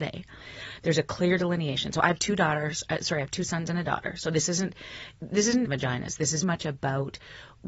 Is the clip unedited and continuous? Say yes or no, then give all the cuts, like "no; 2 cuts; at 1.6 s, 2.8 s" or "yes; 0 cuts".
no; 2 cuts; at 5.6 s, 6.4 s